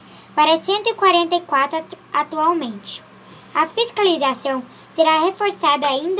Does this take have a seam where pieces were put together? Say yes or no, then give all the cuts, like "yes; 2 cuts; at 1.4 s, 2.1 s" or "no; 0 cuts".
no; 0 cuts